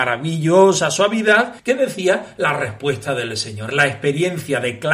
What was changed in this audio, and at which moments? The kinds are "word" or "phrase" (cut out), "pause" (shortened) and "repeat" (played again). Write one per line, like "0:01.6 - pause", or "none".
0:01.6 - pause